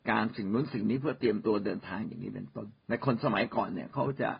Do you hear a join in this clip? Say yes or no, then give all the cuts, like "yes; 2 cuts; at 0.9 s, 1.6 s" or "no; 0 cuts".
yes; 1 cut; at 2.8 s